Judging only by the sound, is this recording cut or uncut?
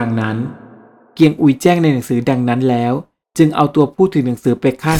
uncut